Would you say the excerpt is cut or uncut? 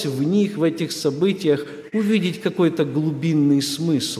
uncut